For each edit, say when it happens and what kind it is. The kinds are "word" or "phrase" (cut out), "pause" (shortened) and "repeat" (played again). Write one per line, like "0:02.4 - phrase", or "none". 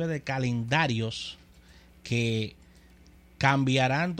none